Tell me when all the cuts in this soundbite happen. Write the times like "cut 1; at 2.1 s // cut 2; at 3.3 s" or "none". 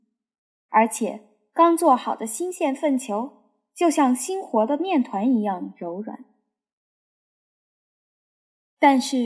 none